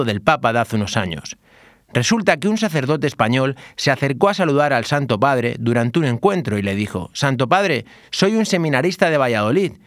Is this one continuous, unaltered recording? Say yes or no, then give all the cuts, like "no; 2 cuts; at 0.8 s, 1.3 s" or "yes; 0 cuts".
yes; 0 cuts